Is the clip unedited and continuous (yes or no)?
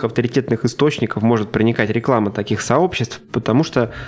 yes